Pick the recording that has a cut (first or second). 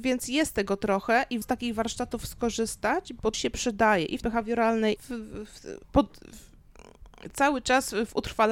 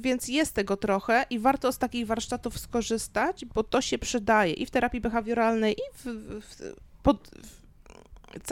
first